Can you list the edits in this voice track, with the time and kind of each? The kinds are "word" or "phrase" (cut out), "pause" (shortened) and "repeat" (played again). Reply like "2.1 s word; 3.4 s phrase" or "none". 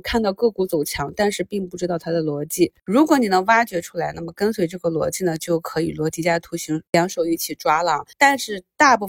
6.9 s pause; 8.1 s pause

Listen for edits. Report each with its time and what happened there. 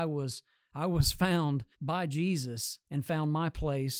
1.7 s pause; 2.8 s pause

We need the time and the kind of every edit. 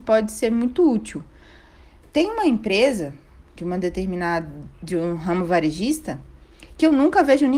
none

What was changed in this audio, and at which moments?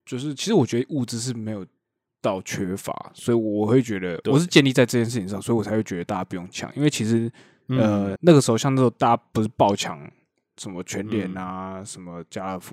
8.2 s word

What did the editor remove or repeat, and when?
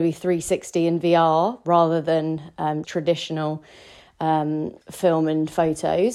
2.8 s word; 4.8 s pause

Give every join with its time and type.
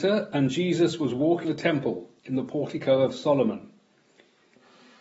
1.4 s word

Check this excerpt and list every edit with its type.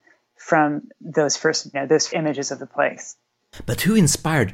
1.0 s pause; 1.7 s word; 2.1 s word

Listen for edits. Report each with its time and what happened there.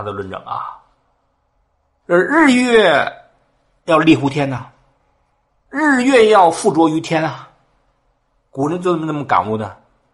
none

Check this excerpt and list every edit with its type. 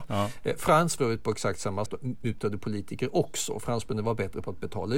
1.0 s phrase; 1.9 s word

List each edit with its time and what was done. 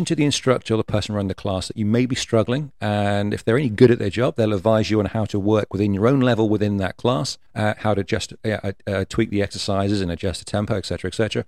7.5 s pause

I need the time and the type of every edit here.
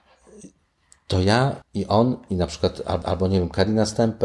1.6 s pause; 3.0 s repeat

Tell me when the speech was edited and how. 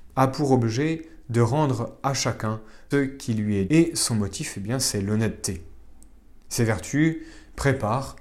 2.9 s word; 3.7 s word

